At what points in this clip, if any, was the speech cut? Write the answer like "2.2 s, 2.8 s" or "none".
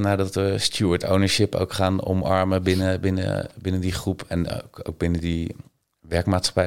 none